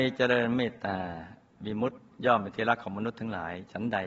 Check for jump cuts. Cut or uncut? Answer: uncut